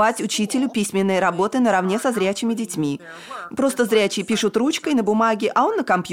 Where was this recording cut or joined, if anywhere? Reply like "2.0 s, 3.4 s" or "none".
none